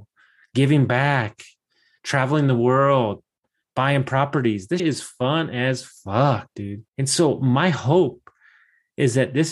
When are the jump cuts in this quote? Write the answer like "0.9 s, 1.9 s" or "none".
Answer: 4.8 s, 6.9 s